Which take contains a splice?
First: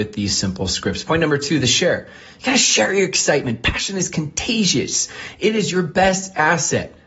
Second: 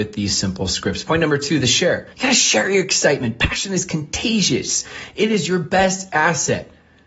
second; 1 cut; at 2.1 s

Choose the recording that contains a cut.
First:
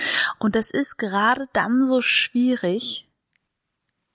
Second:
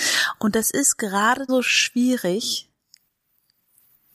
second; 1 cut; at 1.5 s

